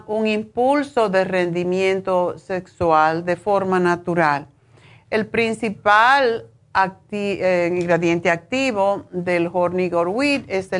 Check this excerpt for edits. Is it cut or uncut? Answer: uncut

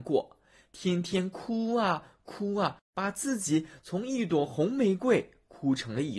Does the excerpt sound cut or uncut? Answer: cut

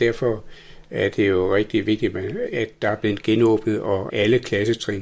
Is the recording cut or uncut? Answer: cut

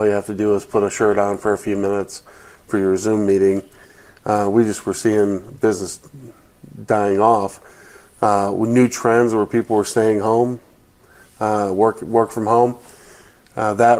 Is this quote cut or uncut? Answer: uncut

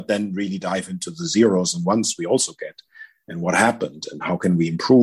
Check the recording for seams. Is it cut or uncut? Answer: uncut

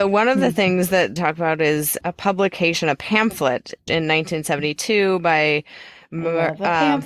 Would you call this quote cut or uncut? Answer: cut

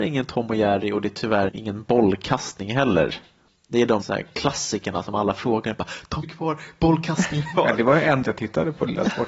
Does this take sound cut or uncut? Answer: cut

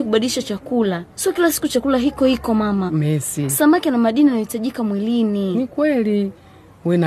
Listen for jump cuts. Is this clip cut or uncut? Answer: cut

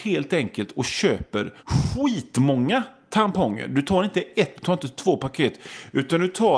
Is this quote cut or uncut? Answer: cut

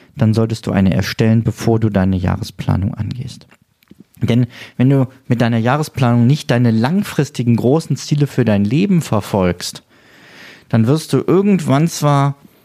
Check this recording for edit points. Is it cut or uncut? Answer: uncut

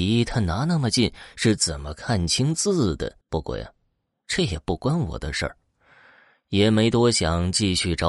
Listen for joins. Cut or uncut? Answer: cut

